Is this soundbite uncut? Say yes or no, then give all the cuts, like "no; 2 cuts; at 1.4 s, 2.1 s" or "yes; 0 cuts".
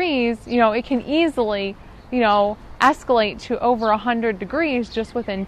yes; 0 cuts